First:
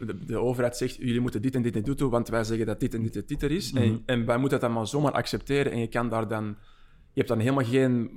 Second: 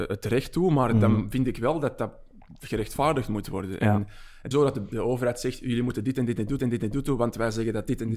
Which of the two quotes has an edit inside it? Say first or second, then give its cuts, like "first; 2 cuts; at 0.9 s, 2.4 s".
second; 3 cuts; at 4.5 s, 4.9 s, 6.6 s